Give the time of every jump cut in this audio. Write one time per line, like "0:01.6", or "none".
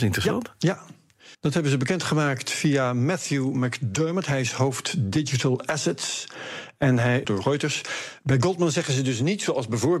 0:01.3
0:07.2